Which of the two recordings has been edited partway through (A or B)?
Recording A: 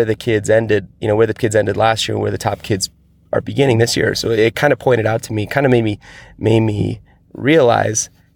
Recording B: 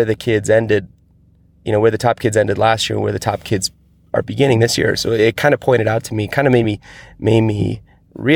A